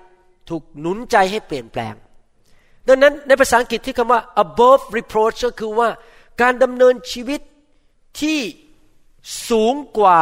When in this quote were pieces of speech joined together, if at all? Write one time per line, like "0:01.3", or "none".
none